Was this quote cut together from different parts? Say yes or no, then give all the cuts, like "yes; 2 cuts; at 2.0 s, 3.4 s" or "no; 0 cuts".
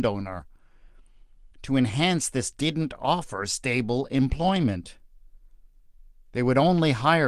yes; 2 cuts; at 1.5 s, 2.5 s